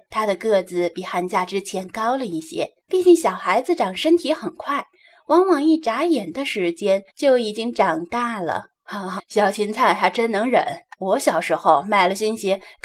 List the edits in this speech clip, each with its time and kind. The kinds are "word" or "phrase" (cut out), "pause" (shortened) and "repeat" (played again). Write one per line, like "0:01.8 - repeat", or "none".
0:02.8 - pause
0:07.1 - pause
0:08.8 - pause
0:09.2 - word
0:10.9 - pause